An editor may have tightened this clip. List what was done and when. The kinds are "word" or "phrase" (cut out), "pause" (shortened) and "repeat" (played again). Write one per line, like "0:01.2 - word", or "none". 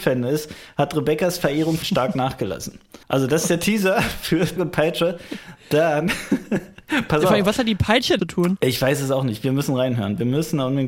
0:01.8 - word
0:03.0 - pause
0:04.6 - word
0:08.2 - phrase